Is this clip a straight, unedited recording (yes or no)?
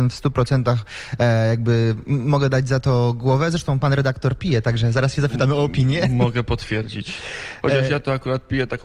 yes